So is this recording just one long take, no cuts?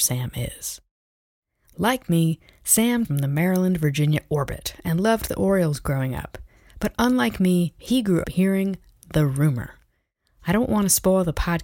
no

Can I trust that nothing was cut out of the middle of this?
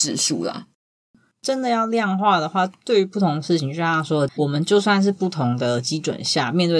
no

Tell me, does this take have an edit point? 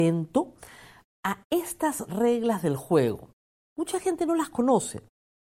no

